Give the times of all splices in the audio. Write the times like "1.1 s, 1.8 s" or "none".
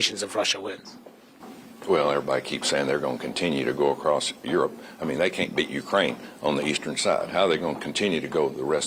none

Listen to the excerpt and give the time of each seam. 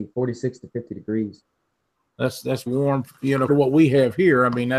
2.7 s, 3.5 s

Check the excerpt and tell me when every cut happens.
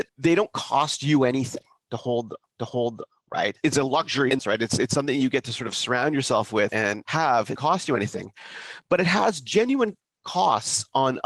2.4 s, 4.4 s, 7.6 s

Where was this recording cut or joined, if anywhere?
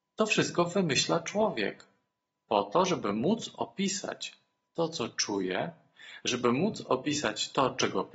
none

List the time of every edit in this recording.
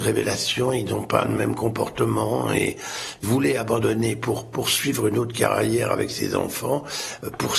3.2 s

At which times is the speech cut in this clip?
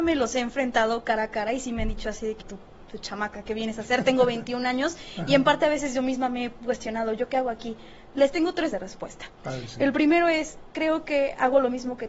2.4 s, 3.4 s, 8.7 s

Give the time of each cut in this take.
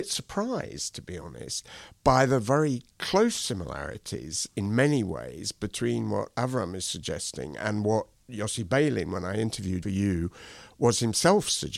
2.9 s, 9.8 s

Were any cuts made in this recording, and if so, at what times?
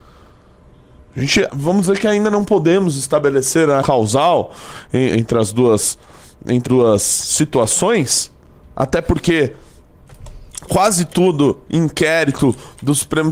1.5 s, 3.8 s, 5.1 s, 6.7 s, 10.7 s, 11.7 s

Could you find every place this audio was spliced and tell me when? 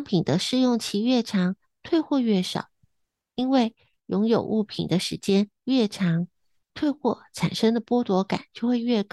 none

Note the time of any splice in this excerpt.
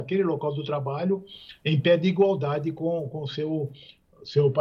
none

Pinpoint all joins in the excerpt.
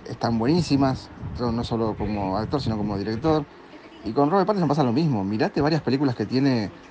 none

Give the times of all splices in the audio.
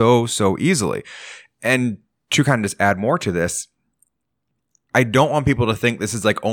none

